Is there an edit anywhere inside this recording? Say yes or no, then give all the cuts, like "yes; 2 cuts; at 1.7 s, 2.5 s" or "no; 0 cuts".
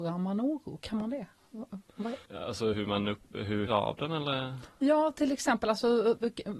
yes; 3 cuts; at 2.2 s, 2.7 s, 3.7 s